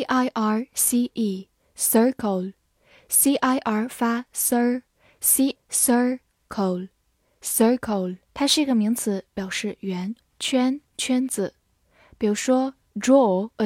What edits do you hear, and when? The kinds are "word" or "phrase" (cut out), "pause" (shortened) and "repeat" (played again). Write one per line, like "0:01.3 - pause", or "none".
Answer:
0:01.1 - word
0:05.5 - phrase
0:08.3 - pause